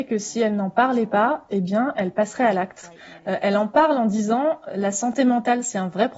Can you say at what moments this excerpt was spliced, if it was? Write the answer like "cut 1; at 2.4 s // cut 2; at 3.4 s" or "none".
none